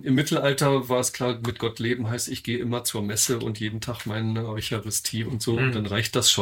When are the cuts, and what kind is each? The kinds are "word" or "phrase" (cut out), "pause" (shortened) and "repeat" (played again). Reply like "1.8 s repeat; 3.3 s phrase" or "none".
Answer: none